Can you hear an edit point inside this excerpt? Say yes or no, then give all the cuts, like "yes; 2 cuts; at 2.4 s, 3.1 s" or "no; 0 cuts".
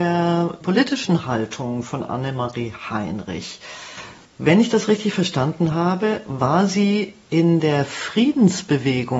no; 0 cuts